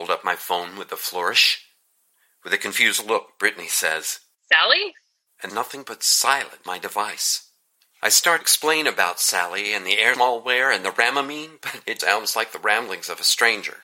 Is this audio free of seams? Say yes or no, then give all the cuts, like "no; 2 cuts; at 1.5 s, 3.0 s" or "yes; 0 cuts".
no; 6 cuts; at 4.4 s, 5.5 s, 6.7 s, 8.4 s, 10.1 s, 12.0 s